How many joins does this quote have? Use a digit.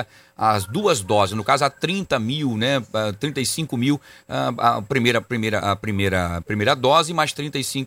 0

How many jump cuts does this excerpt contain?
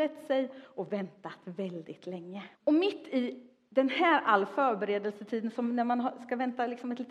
1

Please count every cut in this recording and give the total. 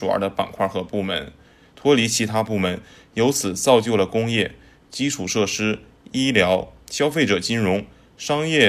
0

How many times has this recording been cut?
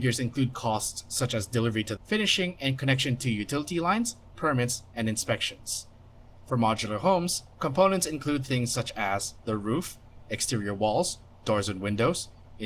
1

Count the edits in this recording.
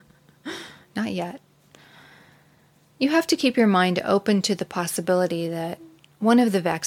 0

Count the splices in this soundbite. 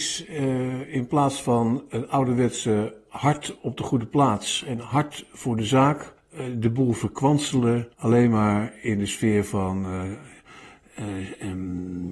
2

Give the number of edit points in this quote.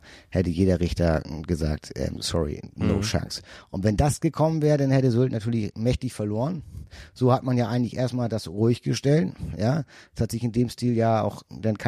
0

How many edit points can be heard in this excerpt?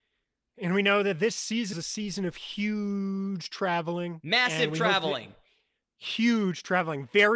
1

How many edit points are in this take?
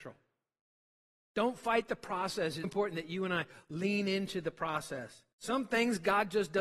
2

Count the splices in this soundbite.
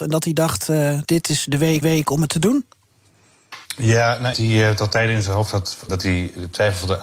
5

